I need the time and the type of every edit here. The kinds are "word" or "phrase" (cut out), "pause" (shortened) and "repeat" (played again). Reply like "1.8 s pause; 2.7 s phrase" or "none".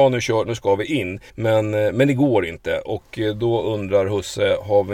1.3 s pause